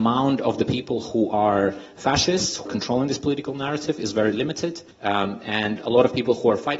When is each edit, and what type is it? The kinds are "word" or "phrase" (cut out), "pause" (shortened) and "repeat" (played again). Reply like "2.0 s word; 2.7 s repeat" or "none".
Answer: 2.7 s word; 4.9 s pause